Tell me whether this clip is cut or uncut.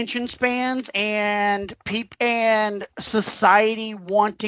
uncut